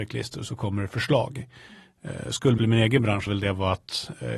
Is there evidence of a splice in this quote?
yes; 2 cuts; at 2.6 s, 3.3 s

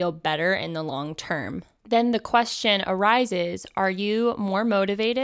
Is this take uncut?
yes; 0 cuts

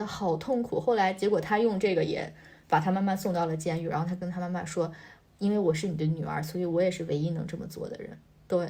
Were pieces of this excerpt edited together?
no; 0 cuts

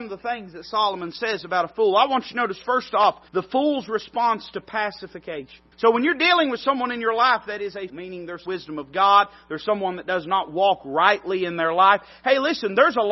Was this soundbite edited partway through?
yes; 4 cuts; at 3.3 s, 5.7 s, 7.9 s, 8.5 s

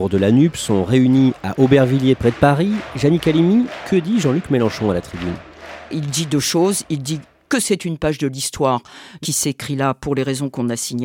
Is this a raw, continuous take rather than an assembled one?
yes; 0 cuts

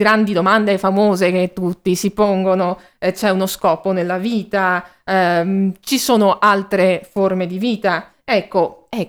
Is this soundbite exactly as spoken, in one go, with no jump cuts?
yes; 0 cuts

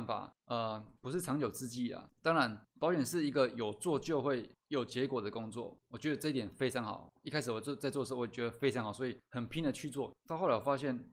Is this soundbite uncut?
no; 1 cut; at 1.0 s

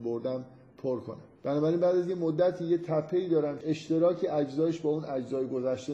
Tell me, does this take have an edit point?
yes; 2 cuts; at 1.4 s, 3.6 s

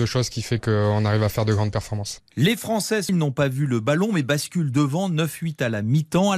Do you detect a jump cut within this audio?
yes; 1 cut; at 3.1 s

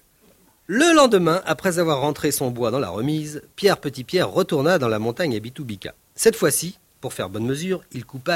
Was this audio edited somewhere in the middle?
no; 0 cuts

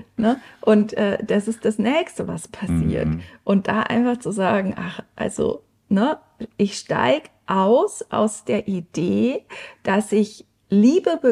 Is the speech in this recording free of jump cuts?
yes; 0 cuts

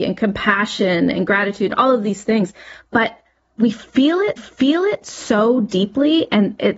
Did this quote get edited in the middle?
yes; 1 cut; at 4.4 s

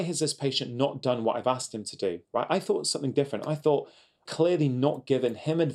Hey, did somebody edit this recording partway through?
yes; 2 cuts; at 2.2 s, 4.3 s

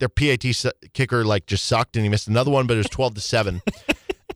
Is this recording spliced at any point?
no; 0 cuts

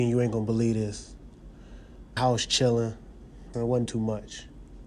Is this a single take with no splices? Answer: no; 3 cuts; at 2.2 s, 3.5 s, 3.9 s

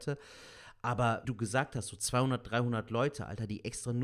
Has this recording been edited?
yes; 1 cut; at 1.2 s

